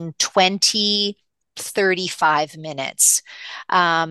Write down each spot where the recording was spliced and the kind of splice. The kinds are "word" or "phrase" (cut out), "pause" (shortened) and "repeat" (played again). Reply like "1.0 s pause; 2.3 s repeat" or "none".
1.5 s word